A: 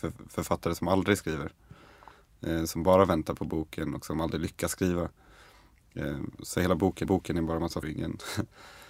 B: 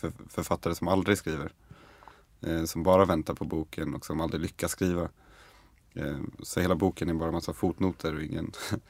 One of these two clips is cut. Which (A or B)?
A